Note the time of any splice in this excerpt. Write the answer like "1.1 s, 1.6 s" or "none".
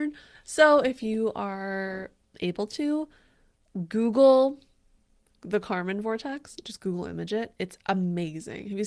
none